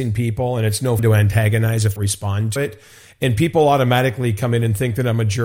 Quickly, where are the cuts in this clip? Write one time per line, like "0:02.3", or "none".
0:01.0
0:02.0
0:02.6